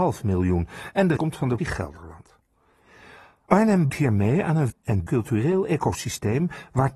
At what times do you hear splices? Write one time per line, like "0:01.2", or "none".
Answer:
0:01.2
0:01.6
0:03.9
0:04.7
0:05.1